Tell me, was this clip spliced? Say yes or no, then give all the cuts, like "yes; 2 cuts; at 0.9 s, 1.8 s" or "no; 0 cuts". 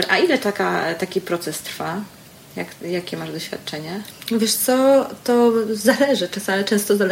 no; 0 cuts